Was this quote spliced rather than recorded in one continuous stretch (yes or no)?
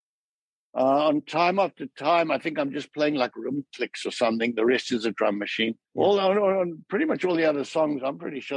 yes